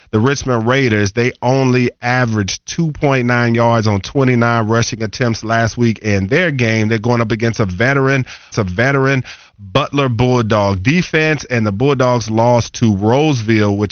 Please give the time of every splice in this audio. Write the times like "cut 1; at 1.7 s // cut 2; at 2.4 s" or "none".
cut 1; at 8.5 s